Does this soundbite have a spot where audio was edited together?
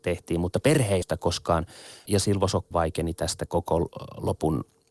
yes; 4 cuts; at 1.0 s, 2.1 s, 2.7 s, 3.5 s

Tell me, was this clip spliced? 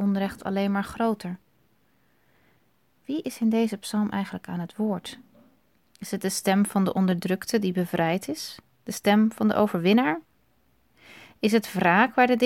no; 0 cuts

